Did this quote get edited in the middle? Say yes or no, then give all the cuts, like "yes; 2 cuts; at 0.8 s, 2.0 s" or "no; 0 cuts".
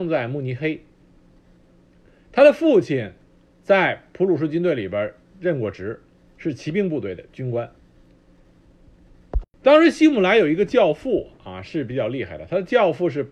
yes; 1 cut; at 6.1 s